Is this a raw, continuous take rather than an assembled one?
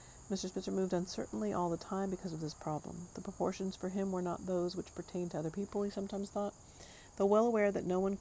yes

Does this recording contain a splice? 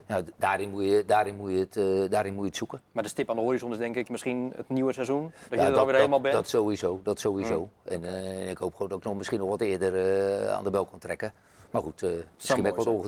no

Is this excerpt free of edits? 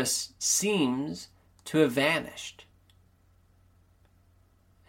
yes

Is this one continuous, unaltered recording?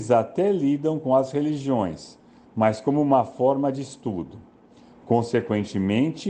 yes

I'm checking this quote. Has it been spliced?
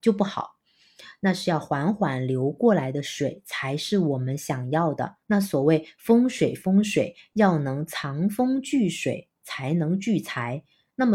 yes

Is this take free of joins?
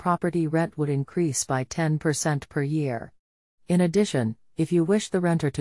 yes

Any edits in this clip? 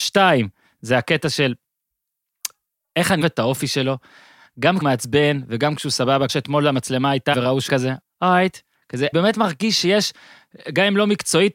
yes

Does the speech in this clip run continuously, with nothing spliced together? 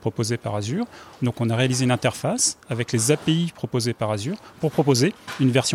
yes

